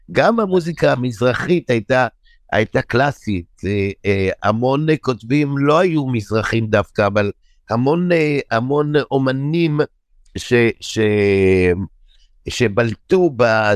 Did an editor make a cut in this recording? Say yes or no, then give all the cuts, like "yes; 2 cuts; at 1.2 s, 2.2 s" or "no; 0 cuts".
no; 0 cuts